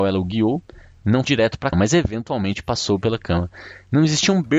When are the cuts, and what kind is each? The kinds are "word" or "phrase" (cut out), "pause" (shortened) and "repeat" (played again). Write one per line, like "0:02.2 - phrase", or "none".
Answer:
0:01.2 - word
0:01.7 - word

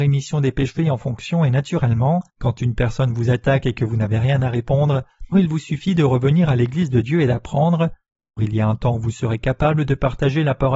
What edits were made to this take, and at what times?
0:02.3 - pause
0:05.3 - word
0:08.4 - word

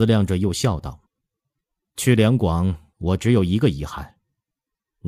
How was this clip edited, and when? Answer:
0:01.1 - pause
0:02.9 - pause

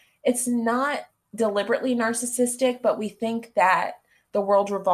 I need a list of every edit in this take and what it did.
0:01.1 - pause

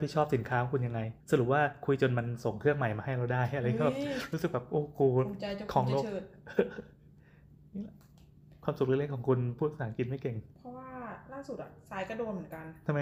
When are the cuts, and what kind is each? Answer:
0:01.2 - pause
0:10.5 - pause

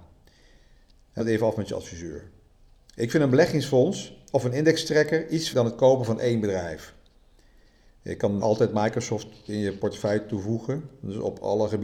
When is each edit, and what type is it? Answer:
0:01.2 - word
0:05.5 - word
0:08.4 - word

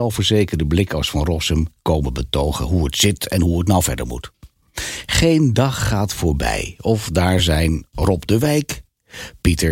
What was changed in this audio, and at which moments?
none

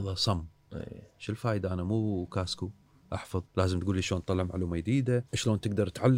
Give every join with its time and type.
0:03.5 - pause
0:05.3 - pause

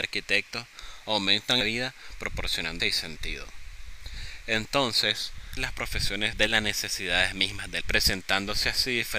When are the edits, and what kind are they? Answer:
0:01.6 - word
0:02.8 - word
0:05.6 - word
0:06.3 - word
0:07.8 - word

